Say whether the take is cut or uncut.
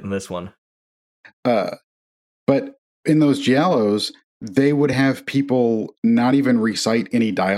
uncut